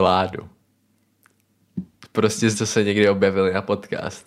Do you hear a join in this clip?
yes; 1 cut; at 2.5 s

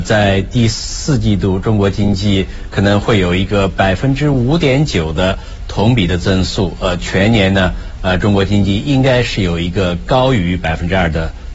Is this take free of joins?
yes; 0 cuts

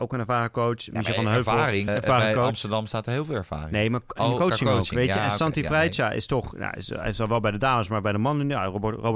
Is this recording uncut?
no; 1 cut; at 1.9 s

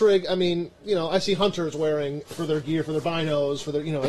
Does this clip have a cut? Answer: yes; 1 cut; at 2.2 s

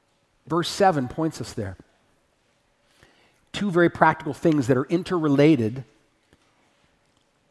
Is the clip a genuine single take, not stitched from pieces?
yes; 0 cuts

